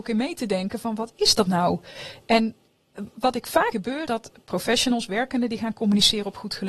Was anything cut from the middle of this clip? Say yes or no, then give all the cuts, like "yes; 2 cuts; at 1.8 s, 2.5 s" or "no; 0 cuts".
yes; 2 cuts; at 3.7 s, 4.1 s